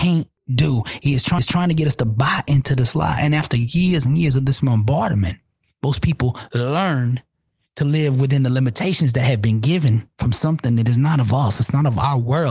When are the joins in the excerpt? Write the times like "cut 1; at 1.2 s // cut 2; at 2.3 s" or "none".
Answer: cut 1; at 1.4 s // cut 2; at 10.1 s